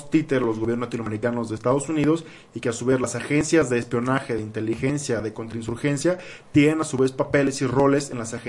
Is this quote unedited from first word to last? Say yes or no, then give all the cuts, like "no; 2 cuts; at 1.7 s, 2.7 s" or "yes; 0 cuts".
yes; 0 cuts